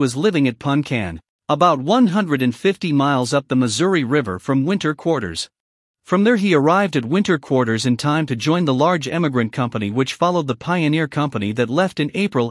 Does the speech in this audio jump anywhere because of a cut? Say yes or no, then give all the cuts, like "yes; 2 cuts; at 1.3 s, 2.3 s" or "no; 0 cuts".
yes; 1 cut; at 5.7 s